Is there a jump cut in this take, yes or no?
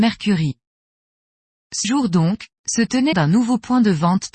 yes